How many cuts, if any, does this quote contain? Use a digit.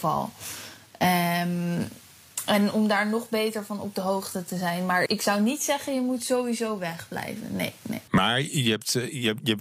1